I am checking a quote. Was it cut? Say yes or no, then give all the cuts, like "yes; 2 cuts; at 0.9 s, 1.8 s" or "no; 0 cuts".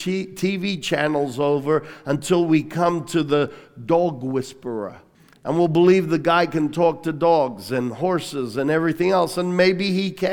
yes; 1 cut; at 5.1 s